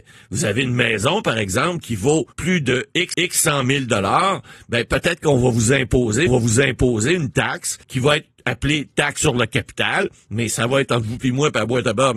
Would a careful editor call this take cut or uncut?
cut